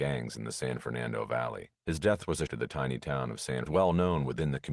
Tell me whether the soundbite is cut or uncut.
cut